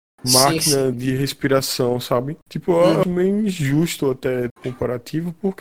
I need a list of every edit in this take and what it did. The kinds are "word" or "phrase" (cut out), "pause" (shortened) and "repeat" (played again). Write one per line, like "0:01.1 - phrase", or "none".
0:00.9 - word
0:02.4 - pause
0:03.0 - word
0:04.5 - word